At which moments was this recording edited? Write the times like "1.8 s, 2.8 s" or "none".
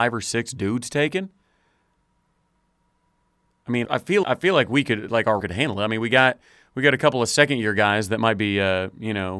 3.8 s, 4.2 s, 5.4 s